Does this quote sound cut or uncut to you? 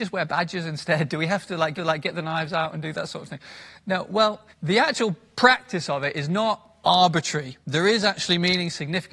cut